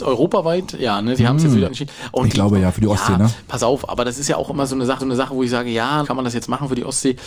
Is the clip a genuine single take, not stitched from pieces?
no; 3 cuts; at 1.6 s, 5.0 s, 6.0 s

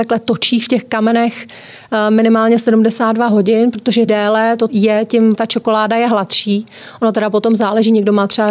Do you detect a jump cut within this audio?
yes; 3 cuts; at 4.1 s, 4.7 s, 5.3 s

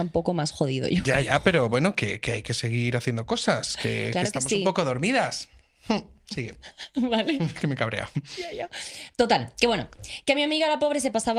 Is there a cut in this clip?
no; 0 cuts

